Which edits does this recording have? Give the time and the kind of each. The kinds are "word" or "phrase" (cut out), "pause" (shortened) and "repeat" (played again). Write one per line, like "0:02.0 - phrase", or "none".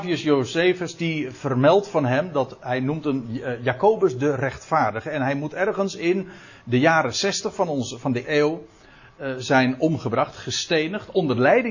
0:08.2 - word